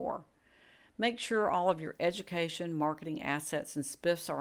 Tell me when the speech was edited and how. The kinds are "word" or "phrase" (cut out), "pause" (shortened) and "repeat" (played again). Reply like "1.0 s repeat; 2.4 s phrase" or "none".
none